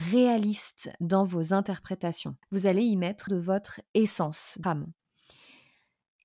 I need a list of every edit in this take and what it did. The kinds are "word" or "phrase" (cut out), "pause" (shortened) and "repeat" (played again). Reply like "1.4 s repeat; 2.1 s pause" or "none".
2.4 s pause; 3.3 s word; 3.9 s pause; 4.6 s word